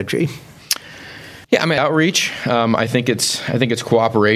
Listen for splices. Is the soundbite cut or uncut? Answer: cut